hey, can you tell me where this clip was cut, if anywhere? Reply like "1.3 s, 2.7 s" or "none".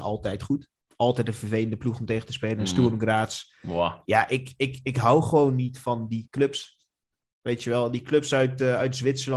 none